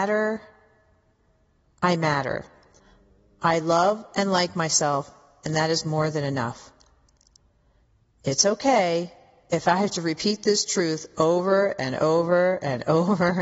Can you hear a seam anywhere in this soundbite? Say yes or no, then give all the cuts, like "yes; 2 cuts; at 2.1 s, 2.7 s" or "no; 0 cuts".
no; 0 cuts